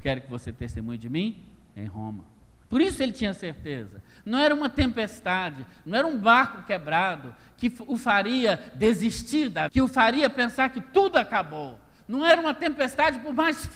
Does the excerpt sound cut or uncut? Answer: cut